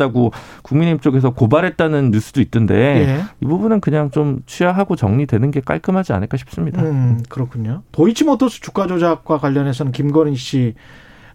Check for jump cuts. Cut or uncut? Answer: cut